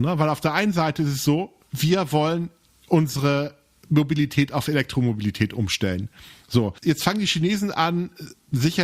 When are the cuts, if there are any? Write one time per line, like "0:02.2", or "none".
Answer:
none